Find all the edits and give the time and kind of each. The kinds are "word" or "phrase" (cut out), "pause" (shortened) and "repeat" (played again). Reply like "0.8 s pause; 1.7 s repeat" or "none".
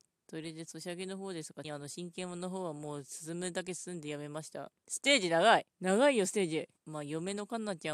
1.6 s phrase; 4.8 s pause; 5.7 s pause; 6.8 s pause